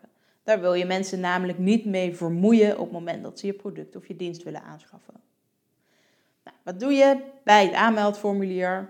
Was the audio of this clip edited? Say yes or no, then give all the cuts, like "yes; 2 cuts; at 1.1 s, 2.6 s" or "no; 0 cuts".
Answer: no; 0 cuts